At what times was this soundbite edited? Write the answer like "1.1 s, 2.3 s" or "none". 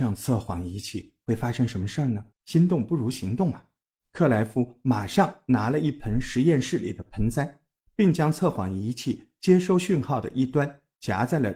2.3 s